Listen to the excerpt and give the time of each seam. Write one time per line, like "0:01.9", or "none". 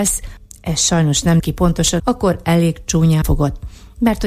0:01.4
0:02.0
0:03.2